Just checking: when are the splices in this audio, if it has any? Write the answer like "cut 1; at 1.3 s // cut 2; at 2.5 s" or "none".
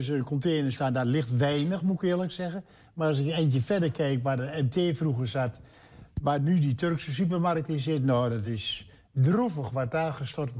none